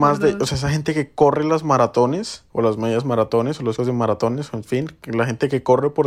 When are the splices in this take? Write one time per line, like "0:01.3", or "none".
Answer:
0:02.5
0:03.8